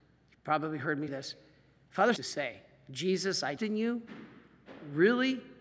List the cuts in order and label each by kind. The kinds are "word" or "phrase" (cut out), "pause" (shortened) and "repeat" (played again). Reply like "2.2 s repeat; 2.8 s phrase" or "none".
1.1 s word; 2.2 s phrase; 3.6 s word